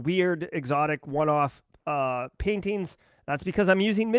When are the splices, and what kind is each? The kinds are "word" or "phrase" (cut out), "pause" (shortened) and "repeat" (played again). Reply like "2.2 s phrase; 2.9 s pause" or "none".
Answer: none